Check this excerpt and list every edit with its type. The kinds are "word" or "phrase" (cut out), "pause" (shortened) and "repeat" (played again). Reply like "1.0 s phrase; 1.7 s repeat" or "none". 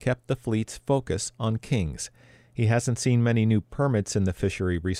none